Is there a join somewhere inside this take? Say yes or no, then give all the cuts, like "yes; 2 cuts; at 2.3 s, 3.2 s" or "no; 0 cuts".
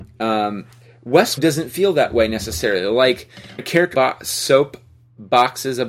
yes; 3 cuts; at 1.4 s, 3.6 s, 3.9 s